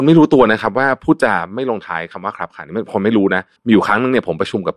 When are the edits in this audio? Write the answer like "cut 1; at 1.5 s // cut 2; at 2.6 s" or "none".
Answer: cut 1; at 3.6 s